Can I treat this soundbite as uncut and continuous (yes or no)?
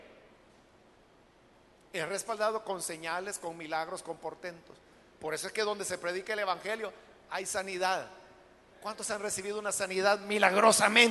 yes